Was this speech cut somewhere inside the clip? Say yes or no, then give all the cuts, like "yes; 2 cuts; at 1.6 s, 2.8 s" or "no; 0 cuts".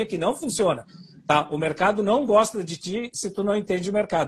no; 0 cuts